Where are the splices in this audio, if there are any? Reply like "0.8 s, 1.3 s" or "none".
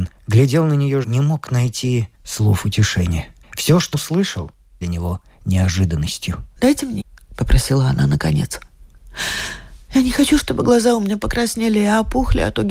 1.0 s, 2.1 s, 3.4 s, 3.9 s, 4.8 s, 6.6 s, 7.0 s